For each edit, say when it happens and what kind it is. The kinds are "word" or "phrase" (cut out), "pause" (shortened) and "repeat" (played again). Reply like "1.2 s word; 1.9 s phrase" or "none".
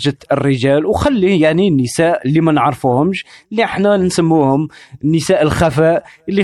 none